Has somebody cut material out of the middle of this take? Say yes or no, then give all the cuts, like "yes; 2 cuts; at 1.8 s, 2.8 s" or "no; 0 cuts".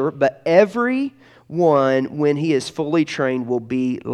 no; 0 cuts